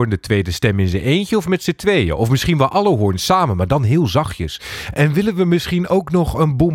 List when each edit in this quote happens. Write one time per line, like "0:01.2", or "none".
none